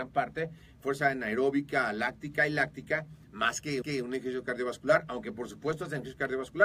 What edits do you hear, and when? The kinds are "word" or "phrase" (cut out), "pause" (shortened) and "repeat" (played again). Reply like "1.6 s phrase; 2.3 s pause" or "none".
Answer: 3.8 s repeat